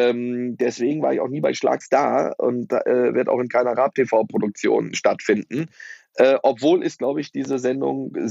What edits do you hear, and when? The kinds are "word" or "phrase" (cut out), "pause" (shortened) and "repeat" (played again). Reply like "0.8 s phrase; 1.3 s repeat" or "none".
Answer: 1.8 s word; 4.9 s word